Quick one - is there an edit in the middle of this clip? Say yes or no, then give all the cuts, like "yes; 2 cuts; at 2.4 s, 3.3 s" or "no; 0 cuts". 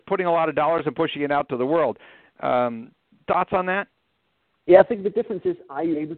no; 0 cuts